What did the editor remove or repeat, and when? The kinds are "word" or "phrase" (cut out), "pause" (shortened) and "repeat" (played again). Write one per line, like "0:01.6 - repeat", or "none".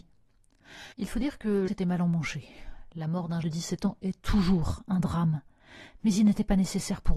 0:00.9 - pause
0:01.7 - phrase
0:03.4 - word

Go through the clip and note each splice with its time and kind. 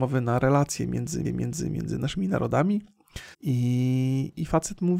0:01.2 - repeat
0:03.3 - pause

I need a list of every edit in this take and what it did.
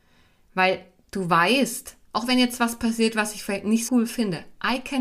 0:02.0 - pause
0:03.9 - word

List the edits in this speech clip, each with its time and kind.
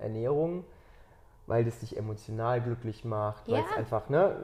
none

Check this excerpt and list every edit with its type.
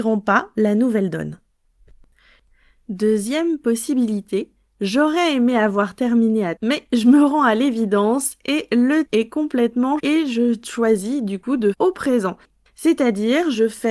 0:06.6 - word
0:09.0 - word
0:10.0 - word
0:11.7 - word

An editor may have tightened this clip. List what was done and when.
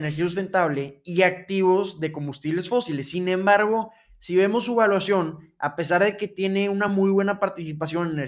none

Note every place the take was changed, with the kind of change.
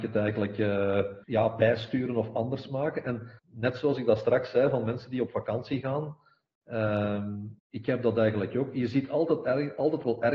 0:01.2 - pause
0:03.4 - pause
0:07.6 - pause

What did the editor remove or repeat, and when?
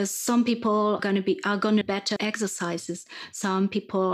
0:01.0 - word
0:01.8 - word
0:02.2 - word

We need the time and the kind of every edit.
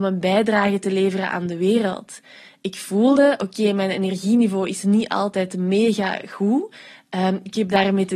none

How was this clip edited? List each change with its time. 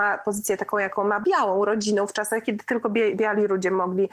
0:01.2 - word

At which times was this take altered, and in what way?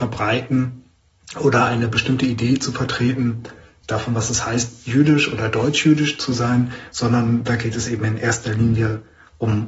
none

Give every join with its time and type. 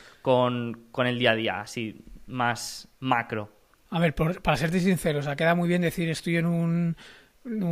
0:03.7 - pause

